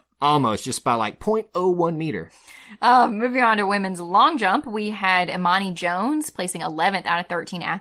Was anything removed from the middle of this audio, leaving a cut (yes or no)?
no